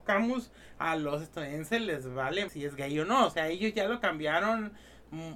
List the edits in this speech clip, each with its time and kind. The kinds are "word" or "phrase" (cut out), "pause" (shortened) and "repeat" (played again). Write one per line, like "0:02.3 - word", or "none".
0:02.5 - word